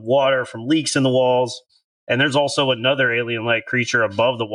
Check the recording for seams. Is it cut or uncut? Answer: uncut